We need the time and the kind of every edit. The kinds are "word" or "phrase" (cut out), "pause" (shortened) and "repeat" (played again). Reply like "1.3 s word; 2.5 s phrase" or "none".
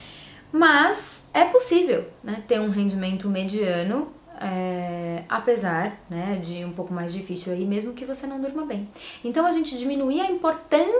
1.3 s word